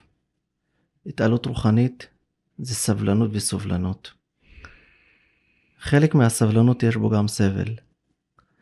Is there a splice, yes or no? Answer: no